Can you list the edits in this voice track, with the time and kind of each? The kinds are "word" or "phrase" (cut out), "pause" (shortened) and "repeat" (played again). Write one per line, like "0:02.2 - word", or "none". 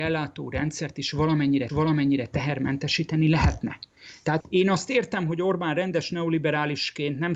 0:01.7 - repeat
0:04.4 - word